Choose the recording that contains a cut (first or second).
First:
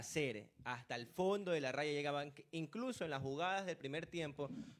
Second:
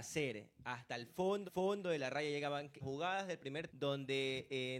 second